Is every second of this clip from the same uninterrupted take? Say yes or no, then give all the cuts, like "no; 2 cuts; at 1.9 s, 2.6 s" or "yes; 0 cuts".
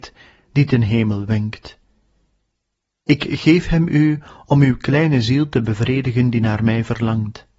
yes; 0 cuts